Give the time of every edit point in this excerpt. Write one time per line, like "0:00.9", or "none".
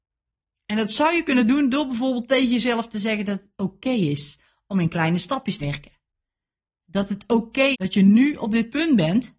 0:05.6
0:07.7